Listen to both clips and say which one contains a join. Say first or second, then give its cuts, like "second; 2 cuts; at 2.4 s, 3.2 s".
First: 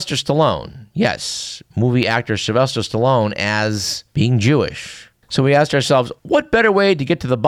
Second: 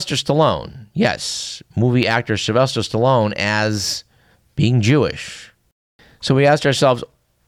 first; 3 cuts; at 4.1 s, 5.2 s, 6.2 s